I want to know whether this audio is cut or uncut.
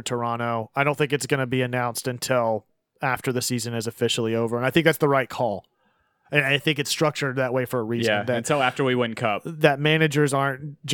uncut